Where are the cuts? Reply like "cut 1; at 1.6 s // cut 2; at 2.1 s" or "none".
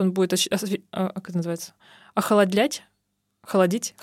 none